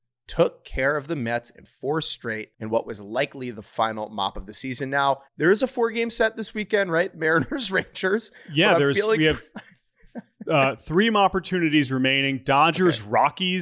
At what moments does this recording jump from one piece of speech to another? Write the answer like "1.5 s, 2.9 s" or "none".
2.5 s, 5.3 s